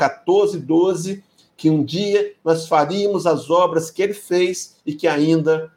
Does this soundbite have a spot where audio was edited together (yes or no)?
no